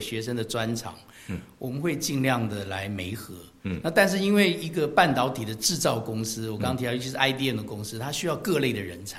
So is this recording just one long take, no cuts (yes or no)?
yes